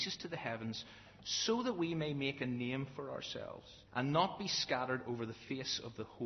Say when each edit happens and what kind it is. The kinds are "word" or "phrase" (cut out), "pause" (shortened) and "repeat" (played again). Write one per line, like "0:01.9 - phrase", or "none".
0:03.9 - pause